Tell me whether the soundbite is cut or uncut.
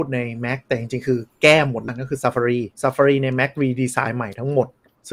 cut